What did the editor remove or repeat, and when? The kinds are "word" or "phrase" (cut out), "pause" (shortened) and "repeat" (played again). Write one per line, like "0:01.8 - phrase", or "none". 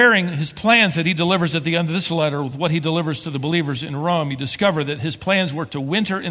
none

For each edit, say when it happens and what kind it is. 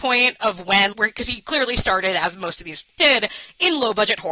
0:00.9 - word
0:03.0 - word

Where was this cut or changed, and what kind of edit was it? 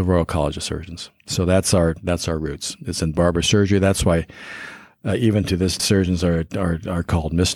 0:01.2 - pause
0:05.8 - phrase

